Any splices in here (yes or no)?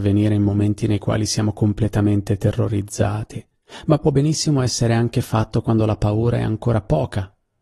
no